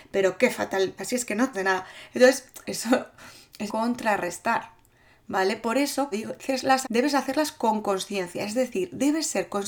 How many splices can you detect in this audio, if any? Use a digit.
6